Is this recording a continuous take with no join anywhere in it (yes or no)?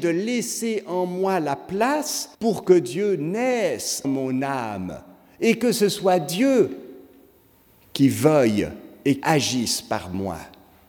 no